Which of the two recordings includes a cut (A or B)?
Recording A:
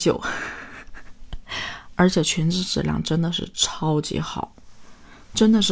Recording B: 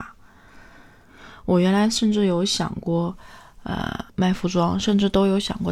B